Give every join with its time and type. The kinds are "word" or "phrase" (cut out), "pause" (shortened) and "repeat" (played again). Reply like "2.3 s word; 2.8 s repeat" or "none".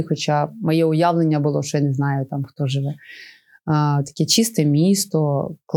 none